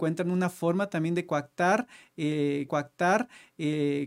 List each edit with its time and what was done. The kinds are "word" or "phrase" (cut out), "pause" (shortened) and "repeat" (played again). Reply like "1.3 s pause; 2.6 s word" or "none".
2.7 s repeat